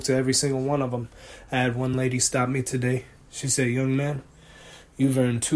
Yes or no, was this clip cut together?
no